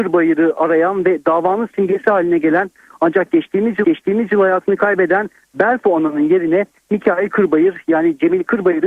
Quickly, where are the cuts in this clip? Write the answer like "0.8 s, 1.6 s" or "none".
3.8 s